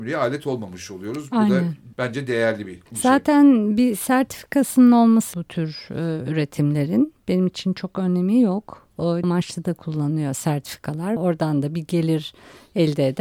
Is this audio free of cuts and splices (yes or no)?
no